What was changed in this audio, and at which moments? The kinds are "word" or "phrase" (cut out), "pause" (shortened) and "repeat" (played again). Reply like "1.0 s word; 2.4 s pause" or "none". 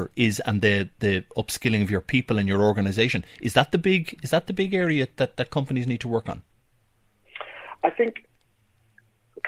none